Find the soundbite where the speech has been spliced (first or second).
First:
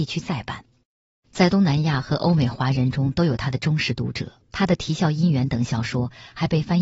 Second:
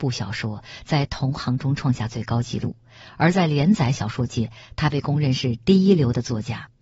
first